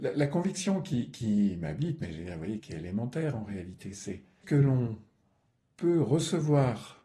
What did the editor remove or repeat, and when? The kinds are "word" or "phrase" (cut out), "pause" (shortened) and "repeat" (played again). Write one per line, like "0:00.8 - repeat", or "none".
0:02.6 - word
0:04.4 - word

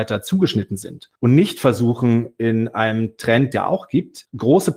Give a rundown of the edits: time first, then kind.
0:01.2 - pause
0:03.5 - phrase

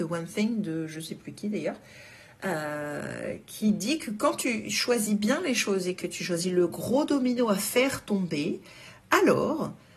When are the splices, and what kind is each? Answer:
none

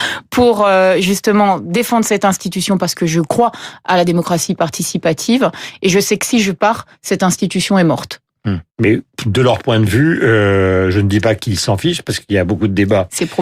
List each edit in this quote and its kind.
0:08.7 - pause

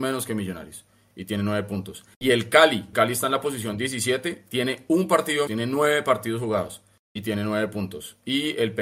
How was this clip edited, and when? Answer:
0:02.1 - pause
0:02.9 - word
0:05.5 - word
0:07.0 - pause

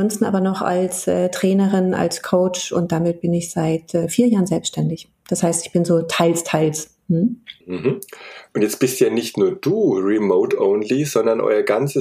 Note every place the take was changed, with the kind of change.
0:07.6 - pause

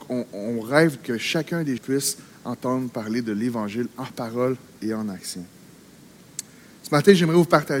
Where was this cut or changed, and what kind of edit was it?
0:01.8 - word

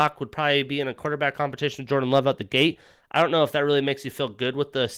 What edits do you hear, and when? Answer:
none

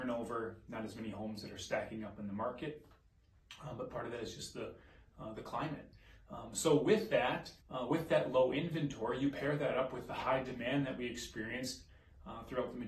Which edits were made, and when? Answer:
0:07.6 - pause

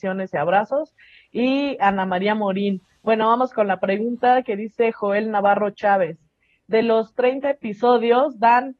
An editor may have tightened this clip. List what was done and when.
none

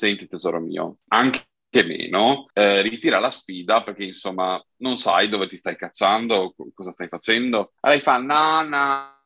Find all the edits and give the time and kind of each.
0:02.5 - pause
0:07.8 - pause

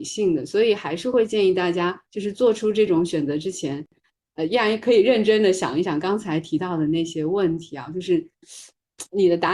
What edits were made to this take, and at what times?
0:02.1 - pause

